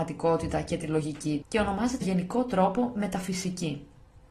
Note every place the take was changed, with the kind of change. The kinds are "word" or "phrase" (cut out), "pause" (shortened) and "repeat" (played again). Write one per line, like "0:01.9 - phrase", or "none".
0:01.4 - word
0:02.0 - word